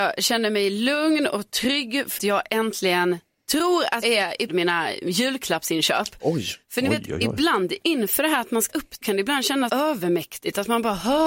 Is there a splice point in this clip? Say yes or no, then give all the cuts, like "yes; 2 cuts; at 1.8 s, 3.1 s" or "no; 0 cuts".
yes; 6 cuts; at 2.2 s, 4.0 s, 4.5 s, 8.7 s, 9.0 s, 9.7 s